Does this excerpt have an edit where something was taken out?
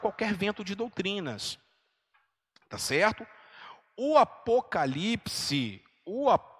no; 0 cuts

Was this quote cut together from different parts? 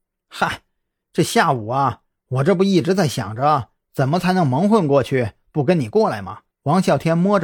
yes; 1 cut; at 6.5 s

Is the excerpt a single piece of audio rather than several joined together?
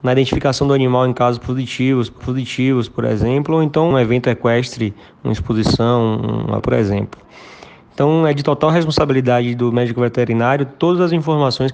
no; 3 cuts; at 2.2 s, 3.9 s, 6.6 s

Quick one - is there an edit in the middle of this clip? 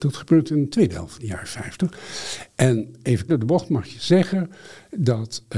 yes; 1 cut; at 3.3 s

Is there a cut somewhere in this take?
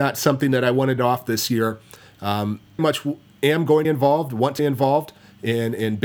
yes; 4 cuts; at 1.0 s, 2.8 s, 3.8 s, 4.6 s

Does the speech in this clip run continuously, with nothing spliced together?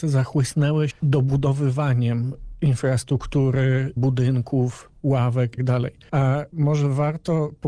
no; 3 cuts; at 0.9 s, 4.0 s, 5.6 s

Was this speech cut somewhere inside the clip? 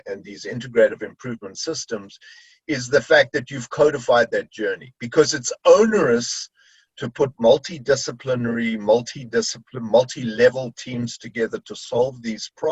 no; 0 cuts

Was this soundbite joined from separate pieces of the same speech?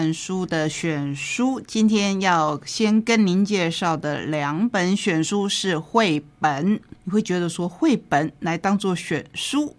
no; 0 cuts

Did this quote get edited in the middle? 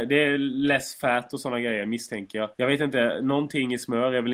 yes; 1 cut; at 2.5 s

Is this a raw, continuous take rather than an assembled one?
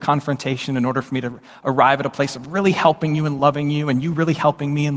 yes; 0 cuts

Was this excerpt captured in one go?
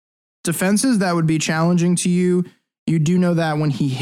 yes; 0 cuts

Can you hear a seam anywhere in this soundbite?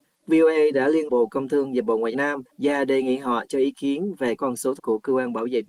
yes; 5 cuts; at 1.1 s, 2.1 s, 2.5 s, 4.4 s, 4.8 s

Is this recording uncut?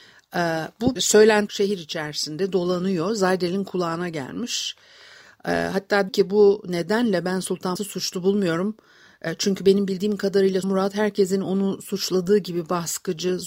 no; 5 cuts; at 1.0 s, 1.5 s, 6.1 s, 7.8 s, 10.6 s

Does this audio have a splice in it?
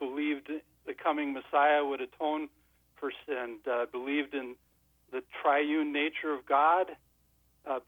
yes; 1 cut; at 3.2 s

